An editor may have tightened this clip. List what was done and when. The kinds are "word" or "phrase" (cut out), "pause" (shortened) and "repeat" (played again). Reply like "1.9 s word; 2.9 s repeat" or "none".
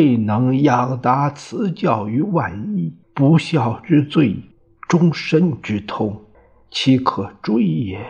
3.0 s pause; 4.5 s pause; 6.3 s pause